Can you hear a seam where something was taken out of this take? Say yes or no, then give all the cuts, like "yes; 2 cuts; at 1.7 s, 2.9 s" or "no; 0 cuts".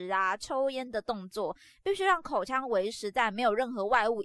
no; 0 cuts